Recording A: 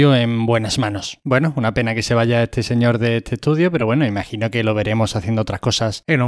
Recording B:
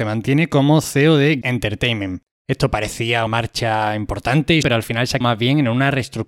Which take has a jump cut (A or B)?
B